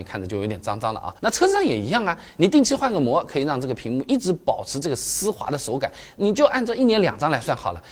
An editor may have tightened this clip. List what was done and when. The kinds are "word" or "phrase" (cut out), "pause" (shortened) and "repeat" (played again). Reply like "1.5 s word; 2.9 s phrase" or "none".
1.2 s pause